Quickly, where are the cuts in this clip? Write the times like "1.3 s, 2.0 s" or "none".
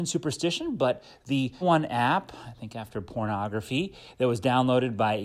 1.6 s